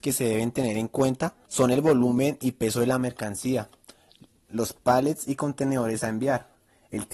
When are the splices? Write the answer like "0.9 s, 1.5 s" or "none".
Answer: 1.4 s